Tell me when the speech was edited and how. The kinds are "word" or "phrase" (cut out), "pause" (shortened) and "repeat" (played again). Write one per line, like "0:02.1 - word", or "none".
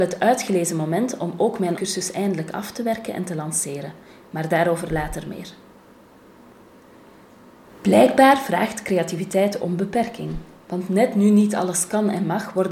0:01.8 - word
0:09.6 - word